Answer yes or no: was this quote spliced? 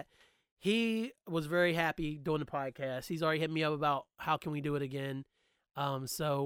no